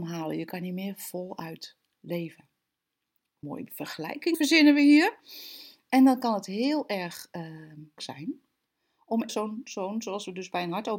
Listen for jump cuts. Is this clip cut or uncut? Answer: cut